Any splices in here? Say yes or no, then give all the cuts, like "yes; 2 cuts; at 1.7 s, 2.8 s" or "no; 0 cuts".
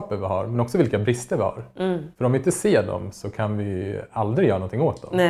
no; 0 cuts